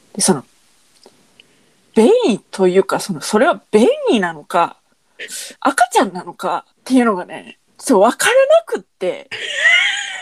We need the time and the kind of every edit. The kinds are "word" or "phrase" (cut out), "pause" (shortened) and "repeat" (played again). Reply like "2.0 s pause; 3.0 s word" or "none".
2.4 s pause; 3.6 s pause; 5.6 s pause; 6.7 s pause; 7.7 s pause